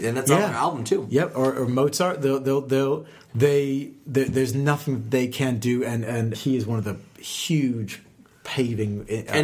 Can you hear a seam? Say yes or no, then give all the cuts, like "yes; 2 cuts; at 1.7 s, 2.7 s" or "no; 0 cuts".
yes; 1 cut; at 6.3 s